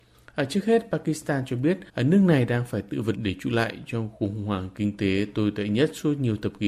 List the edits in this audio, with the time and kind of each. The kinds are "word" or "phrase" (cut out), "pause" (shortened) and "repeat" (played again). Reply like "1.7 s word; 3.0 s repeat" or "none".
1.9 s pause; 3.1 s word